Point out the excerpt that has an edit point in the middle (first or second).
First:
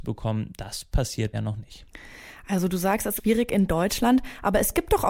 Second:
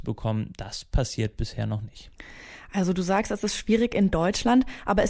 first